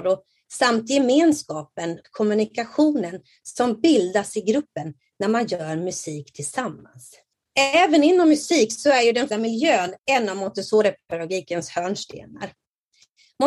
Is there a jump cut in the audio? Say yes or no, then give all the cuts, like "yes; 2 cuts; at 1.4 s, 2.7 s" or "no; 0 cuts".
yes; 3 cuts; at 2.0 s, 9.3 s, 10.0 s